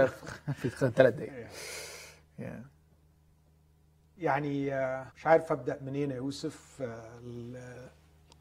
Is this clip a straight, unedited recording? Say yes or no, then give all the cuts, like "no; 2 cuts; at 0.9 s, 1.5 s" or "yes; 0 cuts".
no; 1 cut; at 5.1 s